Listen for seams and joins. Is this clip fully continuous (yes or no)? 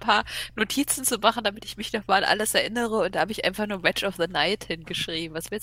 yes